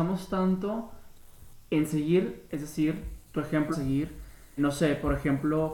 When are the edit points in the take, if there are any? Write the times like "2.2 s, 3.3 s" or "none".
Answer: 1.7 s, 2.5 s, 3.2 s, 3.7 s, 4.6 s

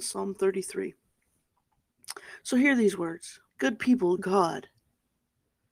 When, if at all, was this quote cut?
3.5 s, 4.2 s

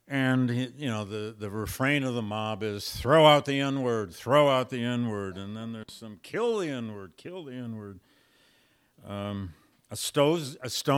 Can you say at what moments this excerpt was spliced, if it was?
none

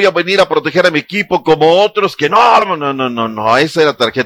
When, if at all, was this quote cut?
2.6 s

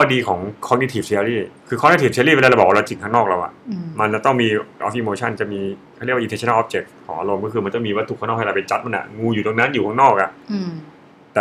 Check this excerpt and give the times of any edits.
1.6 s, 2.9 s, 4.8 s

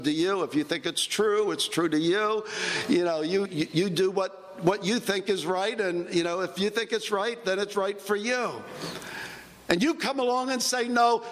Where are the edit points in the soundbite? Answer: 3.5 s

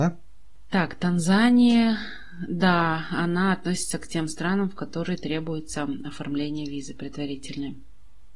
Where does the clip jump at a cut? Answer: none

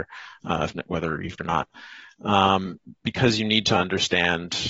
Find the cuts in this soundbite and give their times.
1.4 s

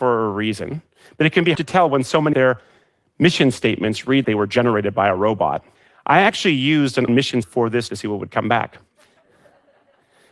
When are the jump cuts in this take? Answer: 1.5 s, 2.3 s, 4.2 s, 5.8 s, 7.1 s, 7.4 s, 7.9 s

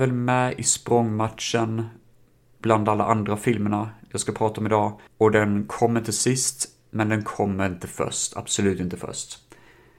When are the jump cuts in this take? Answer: 5.1 s

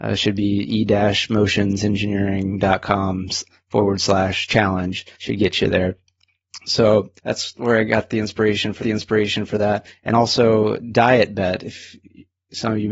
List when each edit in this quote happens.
5.1 s, 7.2 s, 8.8 s, 10.1 s

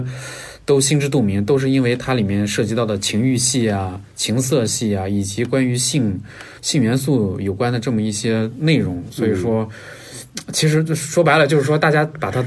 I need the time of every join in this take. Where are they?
6.6 s

